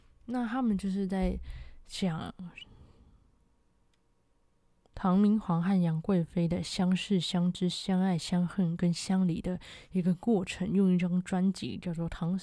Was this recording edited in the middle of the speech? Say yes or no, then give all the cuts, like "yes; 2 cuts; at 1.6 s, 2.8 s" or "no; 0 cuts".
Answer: no; 0 cuts